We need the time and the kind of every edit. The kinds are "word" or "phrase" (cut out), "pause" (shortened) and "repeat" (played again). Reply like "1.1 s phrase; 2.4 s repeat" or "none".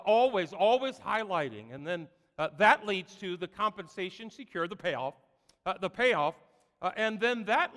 none